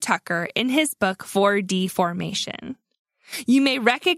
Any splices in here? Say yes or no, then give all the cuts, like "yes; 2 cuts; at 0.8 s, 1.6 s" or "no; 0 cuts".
no; 0 cuts